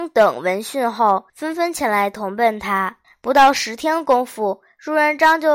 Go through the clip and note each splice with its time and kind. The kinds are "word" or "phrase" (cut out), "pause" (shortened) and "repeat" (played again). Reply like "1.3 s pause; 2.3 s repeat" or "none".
1.3 s pause; 3.0 s pause

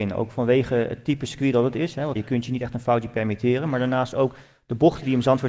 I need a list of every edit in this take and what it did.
2.2 s word

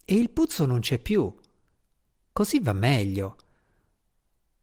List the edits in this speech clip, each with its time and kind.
none

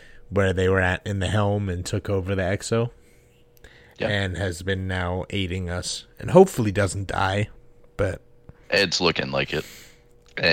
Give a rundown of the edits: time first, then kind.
8.6 s pause

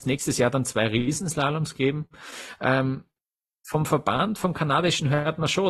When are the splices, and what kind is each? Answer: none

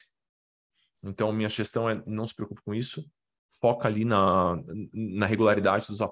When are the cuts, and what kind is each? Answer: none

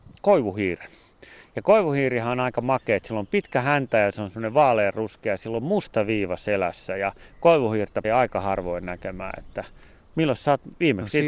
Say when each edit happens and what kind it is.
8.0 s word

